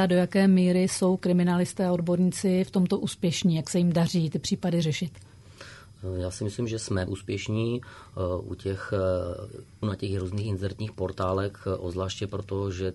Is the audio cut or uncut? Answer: cut